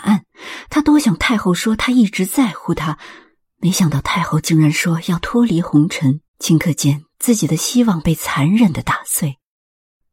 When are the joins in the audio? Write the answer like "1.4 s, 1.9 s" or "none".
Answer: 6.3 s